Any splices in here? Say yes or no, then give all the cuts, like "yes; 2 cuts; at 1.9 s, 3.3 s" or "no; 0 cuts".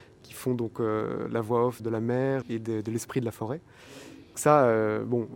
yes; 3 cuts; at 1.8 s, 2.4 s, 4.3 s